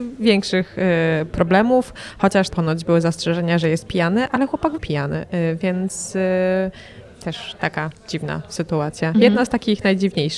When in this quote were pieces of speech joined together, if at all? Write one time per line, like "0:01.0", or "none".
0:02.5
0:04.3
0:04.8